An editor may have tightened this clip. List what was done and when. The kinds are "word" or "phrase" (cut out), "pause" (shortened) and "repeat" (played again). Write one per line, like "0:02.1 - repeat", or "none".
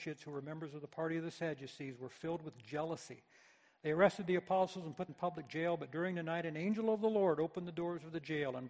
0:05.1 - word